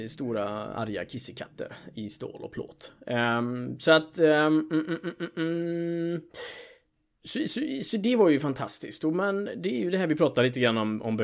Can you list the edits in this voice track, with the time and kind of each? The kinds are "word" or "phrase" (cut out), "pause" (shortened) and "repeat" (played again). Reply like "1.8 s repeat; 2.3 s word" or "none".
none